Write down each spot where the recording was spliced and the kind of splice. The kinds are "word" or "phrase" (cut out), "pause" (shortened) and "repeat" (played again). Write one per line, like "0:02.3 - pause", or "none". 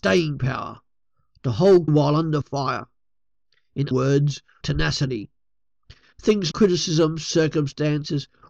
0:01.9 - word
0:03.9 - word
0:04.6 - word
0:06.5 - word